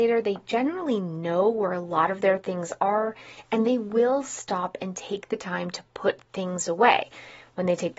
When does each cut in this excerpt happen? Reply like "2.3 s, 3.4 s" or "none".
none